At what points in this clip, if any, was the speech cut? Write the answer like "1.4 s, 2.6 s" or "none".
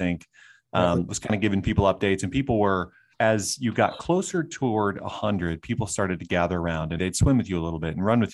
3.1 s, 7.0 s